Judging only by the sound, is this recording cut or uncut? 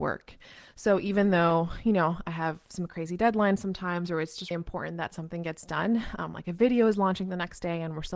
cut